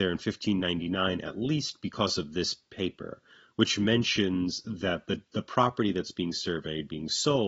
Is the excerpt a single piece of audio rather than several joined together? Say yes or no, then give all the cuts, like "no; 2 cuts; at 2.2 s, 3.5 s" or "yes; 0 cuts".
yes; 0 cuts